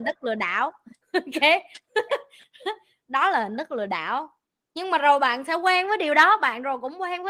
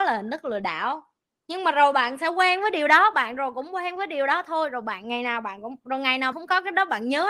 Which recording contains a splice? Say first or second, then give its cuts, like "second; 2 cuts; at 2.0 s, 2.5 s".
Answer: second; 1 cut; at 6.3 s